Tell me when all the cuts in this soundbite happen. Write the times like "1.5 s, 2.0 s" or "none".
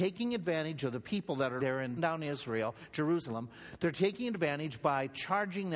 1.6 s, 2.0 s